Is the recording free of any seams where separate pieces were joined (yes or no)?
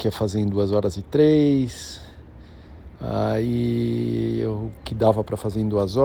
no